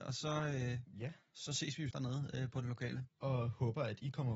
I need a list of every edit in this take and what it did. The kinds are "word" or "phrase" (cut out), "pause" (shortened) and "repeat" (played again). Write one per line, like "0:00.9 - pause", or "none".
0:01.9 - word
0:03.1 - pause